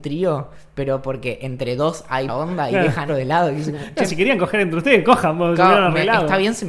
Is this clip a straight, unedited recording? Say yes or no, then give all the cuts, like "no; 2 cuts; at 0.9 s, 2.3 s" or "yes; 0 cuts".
no; 2 cuts; at 2.3 s, 3.1 s